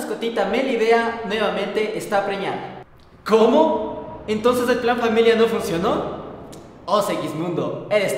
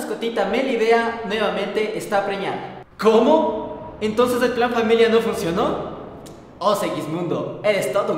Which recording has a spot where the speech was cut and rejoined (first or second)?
second